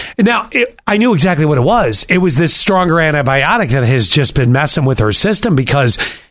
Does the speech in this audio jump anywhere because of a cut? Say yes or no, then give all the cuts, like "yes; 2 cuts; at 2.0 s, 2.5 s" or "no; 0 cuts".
no; 0 cuts